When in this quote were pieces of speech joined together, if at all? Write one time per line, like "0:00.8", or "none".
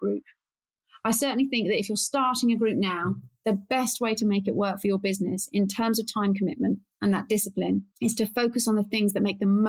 0:07.9

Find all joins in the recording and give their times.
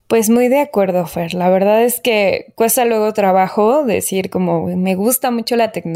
none

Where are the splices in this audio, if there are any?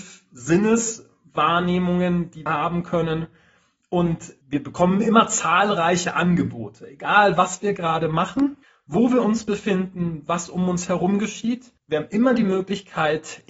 0:02.5
0:04.4
0:08.6
0:11.8

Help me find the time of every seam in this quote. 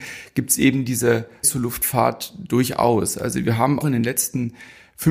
0:01.4
0:03.8

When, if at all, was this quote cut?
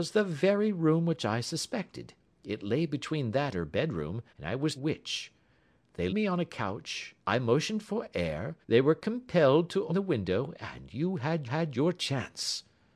0:02.3
0:03.5
0:04.3
0:04.8
0:06.1
0:07.2
0:08.6
0:09.9
0:11.5

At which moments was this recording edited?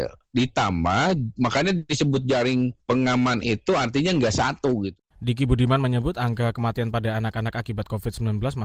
0:05.1

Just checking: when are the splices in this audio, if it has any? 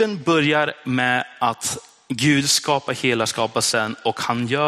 none

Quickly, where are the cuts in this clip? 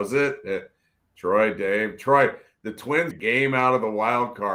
0:03.1

